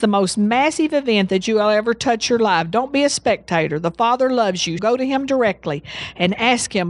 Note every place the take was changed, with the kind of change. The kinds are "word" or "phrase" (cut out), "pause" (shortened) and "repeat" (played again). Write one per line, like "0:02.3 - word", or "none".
0:04.8 - word